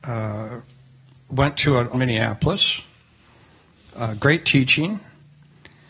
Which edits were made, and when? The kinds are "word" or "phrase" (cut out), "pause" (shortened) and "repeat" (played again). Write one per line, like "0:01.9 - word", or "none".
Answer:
0:01.9 - phrase